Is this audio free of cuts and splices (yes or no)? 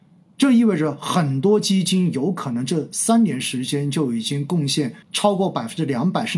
no